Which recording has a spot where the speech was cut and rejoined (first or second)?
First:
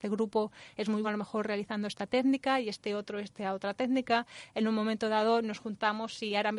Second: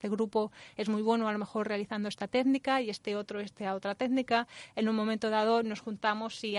first